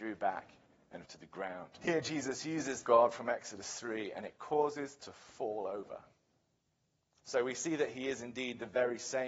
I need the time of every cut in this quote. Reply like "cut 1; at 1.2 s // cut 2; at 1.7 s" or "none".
cut 1; at 1.0 s // cut 2; at 1.8 s // cut 3; at 2.8 s // cut 4; at 5.0 s